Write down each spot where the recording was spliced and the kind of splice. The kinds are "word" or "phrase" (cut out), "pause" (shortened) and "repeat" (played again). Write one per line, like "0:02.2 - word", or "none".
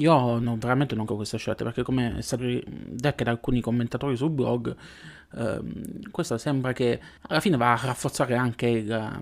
0:01.1 - word
0:02.4 - word
0:03.2 - word
0:06.3 - word
0:07.2 - pause